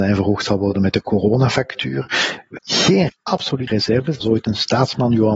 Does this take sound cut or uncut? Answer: cut